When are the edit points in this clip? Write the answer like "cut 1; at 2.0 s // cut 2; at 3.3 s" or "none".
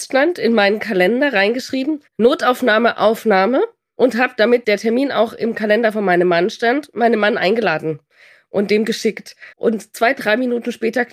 cut 1; at 2.1 s // cut 2; at 9.5 s